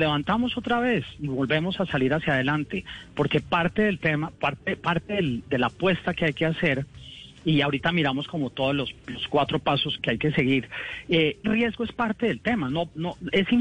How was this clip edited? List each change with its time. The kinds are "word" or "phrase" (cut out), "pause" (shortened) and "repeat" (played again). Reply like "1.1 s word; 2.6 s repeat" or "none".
10.0 s word; 11.4 s phrase

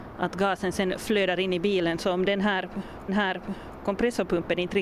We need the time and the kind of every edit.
3.1 s repeat

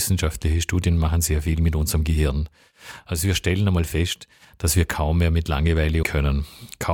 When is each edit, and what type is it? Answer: 6.0 s word

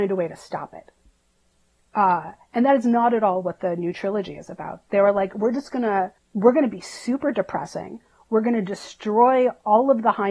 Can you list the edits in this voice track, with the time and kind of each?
6.2 s pause

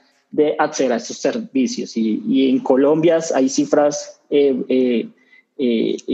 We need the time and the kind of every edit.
2.2 s word

